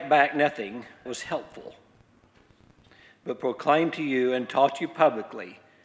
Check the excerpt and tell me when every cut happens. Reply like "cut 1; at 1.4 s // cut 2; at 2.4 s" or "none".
cut 1; at 1.1 s

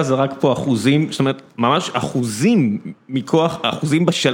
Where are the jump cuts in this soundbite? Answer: none

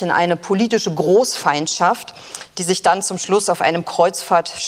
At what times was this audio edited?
none

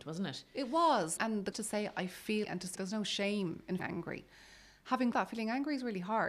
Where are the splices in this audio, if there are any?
cut 1; at 1.2 s // cut 2; at 1.5 s // cut 3; at 2.4 s // cut 4; at 2.8 s // cut 5; at 3.8 s // cut 6; at 5.1 s

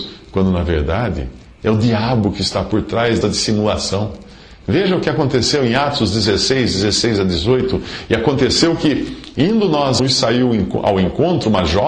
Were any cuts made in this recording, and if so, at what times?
cut 1; at 3.2 s // cut 2; at 10.0 s

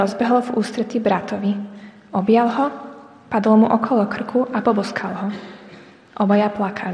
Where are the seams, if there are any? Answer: none

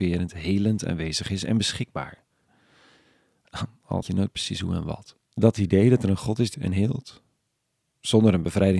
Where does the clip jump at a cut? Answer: cut 1; at 4.0 s // cut 2; at 5.2 s // cut 3; at 6.5 s

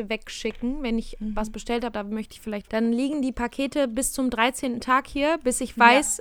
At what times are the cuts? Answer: cut 1; at 1.9 s // cut 2; at 2.7 s

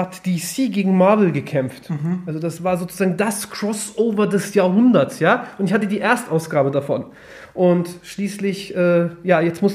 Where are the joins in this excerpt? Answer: none

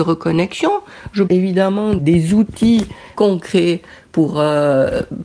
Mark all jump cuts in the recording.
cut 1; at 1.3 s // cut 2; at 2.0 s // cut 3; at 3.2 s

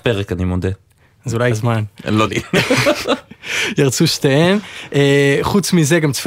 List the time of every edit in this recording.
cut 1; at 1.5 s // cut 2; at 2.3 s

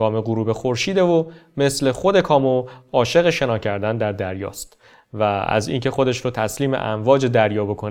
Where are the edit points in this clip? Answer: none

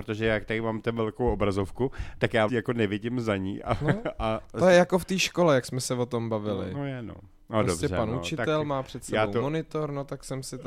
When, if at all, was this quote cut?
cut 1; at 2.5 s

